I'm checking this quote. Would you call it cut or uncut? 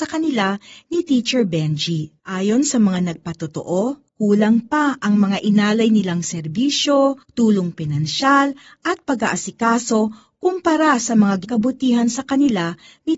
cut